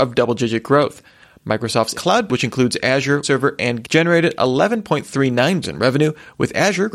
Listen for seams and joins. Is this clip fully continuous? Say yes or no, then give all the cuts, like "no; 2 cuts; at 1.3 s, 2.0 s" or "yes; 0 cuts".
no; 5 cuts; at 1.9 s, 2.3 s, 3.2 s, 3.8 s, 5.6 s